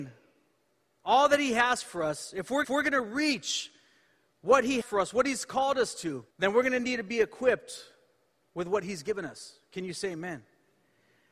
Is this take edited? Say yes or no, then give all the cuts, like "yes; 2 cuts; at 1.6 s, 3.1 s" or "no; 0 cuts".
yes; 3 cuts; at 2.6 s, 4.8 s, 6.3 s